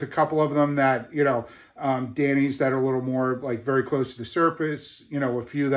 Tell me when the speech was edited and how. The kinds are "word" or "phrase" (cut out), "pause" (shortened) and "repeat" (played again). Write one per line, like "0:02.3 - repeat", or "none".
none